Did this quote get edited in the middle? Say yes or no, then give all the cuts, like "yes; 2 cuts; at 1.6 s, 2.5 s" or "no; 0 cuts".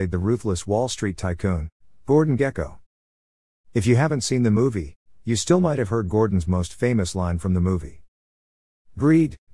no; 0 cuts